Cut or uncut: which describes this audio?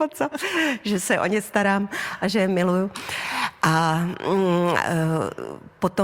uncut